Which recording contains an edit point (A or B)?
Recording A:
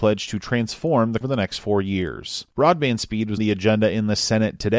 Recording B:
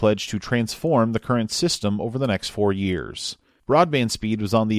A